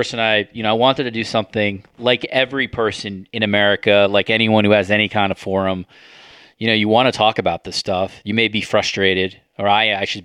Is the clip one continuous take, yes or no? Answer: yes